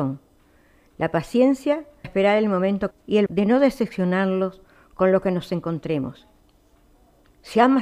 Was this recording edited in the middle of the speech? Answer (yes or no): yes